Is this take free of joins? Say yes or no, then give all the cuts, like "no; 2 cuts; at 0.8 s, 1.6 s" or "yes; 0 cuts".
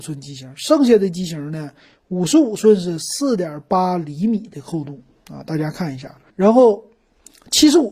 no; 1 cut; at 6.3 s